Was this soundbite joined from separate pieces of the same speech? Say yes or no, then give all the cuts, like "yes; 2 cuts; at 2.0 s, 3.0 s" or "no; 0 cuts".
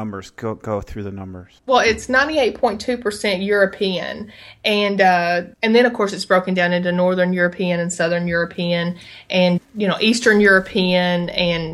yes; 3 cuts; at 1.6 s, 5.5 s, 9.6 s